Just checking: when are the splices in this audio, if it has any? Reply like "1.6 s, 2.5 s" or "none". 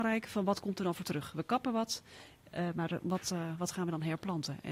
none